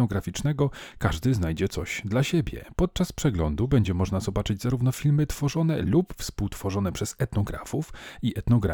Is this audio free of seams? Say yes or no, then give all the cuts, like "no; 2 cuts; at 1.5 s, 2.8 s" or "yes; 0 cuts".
yes; 0 cuts